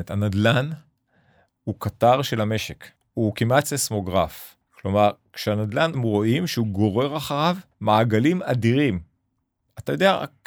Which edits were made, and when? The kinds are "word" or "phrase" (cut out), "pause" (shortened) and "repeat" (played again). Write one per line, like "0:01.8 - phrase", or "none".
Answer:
0:03.0 - pause
0:04.6 - pause
0:05.9 - phrase
0:07.7 - pause